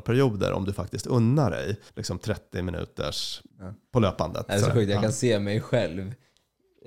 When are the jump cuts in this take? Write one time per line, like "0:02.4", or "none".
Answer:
0:01.9
0:03.5